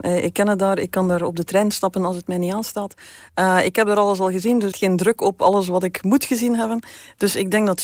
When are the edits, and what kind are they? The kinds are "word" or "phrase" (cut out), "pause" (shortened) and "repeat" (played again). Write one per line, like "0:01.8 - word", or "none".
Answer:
0:04.7 - phrase